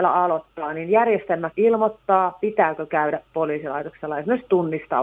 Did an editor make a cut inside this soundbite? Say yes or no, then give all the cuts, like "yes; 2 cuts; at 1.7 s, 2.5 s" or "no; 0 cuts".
yes; 1 cut; at 1.5 s